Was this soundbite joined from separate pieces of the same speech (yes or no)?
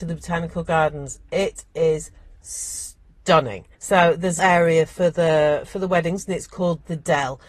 yes